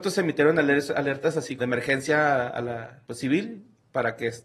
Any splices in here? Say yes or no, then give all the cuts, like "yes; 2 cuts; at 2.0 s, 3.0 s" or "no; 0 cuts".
yes; 2 cuts; at 1.6 s, 3.0 s